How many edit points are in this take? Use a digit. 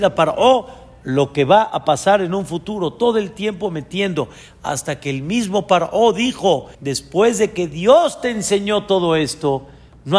1